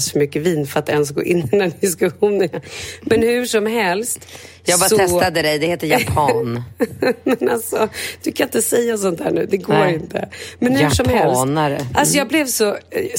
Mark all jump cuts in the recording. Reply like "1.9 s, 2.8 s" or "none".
2.5 s